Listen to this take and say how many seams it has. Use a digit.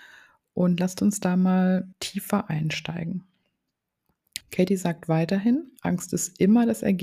3